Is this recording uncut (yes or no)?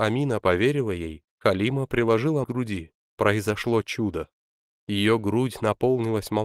no